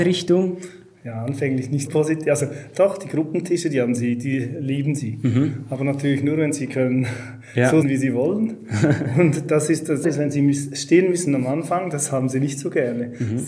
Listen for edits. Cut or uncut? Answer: cut